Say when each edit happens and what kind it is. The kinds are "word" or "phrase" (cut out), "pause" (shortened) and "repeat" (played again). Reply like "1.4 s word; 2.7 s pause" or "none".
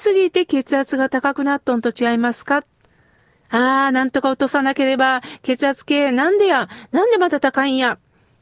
none